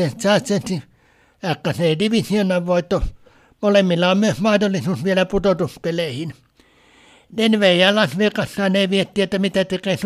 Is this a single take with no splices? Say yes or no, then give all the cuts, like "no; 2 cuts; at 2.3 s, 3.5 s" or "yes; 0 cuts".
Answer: yes; 0 cuts